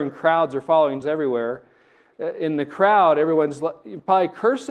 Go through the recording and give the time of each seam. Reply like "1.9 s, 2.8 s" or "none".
1.0 s